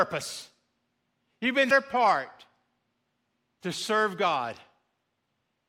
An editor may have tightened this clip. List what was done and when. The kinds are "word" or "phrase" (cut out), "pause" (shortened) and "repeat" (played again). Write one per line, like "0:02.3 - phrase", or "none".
0:01.7 - word

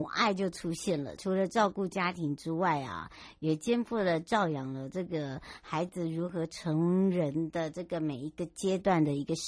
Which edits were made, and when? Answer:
0:01.2 - phrase

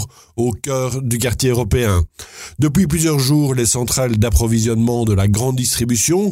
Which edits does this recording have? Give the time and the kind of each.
none

